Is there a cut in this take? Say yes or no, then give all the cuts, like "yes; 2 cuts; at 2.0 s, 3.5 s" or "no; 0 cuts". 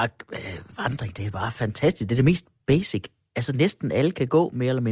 no; 0 cuts